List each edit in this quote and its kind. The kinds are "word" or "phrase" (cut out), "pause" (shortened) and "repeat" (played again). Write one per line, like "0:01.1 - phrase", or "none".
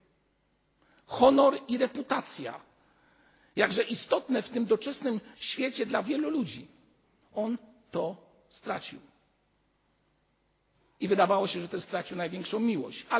0:05.3 - pause